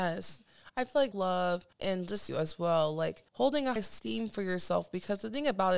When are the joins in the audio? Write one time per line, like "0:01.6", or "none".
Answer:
0:01.1
0:01.7
0:02.3
0:03.3
0:03.8